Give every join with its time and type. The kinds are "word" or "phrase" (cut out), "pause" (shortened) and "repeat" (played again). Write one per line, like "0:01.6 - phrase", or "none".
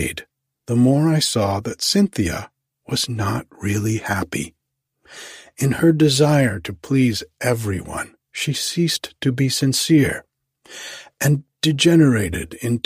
0:08.2 - pause